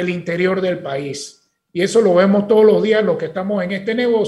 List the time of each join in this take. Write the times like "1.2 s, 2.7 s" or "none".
none